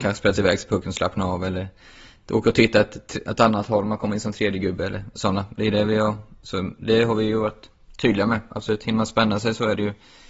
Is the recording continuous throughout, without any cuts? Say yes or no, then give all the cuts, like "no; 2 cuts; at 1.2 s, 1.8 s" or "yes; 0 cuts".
yes; 0 cuts